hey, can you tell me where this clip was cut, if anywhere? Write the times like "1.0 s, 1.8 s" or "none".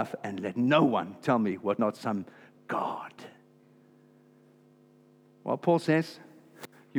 1.8 s